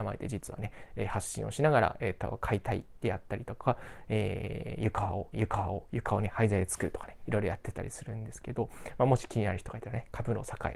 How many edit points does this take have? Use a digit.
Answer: 1